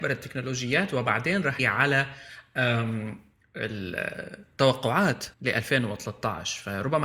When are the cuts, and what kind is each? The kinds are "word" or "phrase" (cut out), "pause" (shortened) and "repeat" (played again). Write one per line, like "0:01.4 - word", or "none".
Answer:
0:01.6 - word
0:05.3 - pause

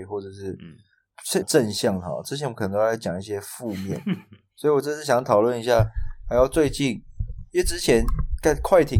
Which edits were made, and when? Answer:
0:01.4 - phrase

